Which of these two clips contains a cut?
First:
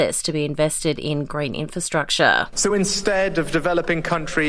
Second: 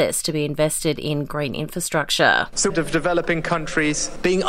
second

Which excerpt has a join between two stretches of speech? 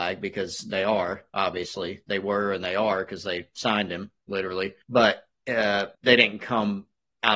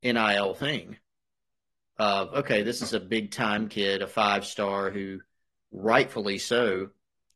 first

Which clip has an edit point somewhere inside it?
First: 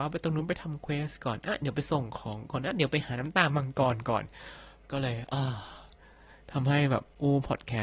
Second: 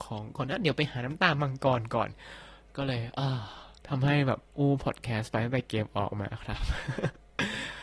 second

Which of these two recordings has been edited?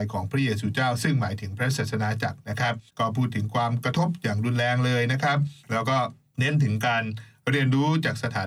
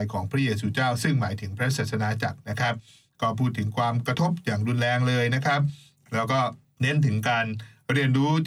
first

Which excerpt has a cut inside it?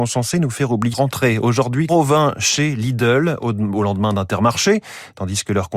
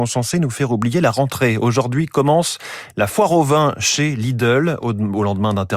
first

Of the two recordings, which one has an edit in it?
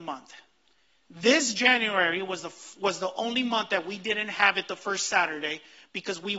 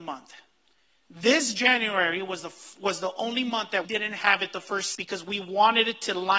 second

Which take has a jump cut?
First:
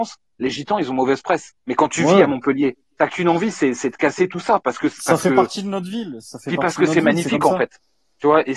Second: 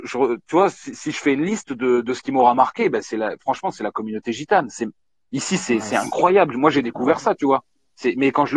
first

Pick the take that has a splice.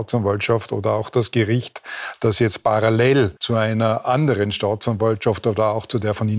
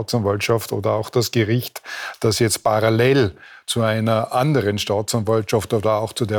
first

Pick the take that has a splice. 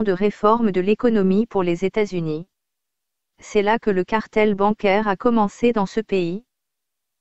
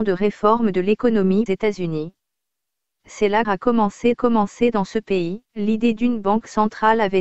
second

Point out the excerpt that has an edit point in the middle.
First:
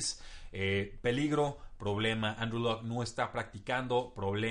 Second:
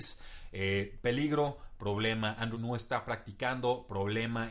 second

